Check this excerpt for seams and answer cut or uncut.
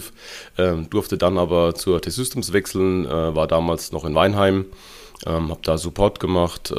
uncut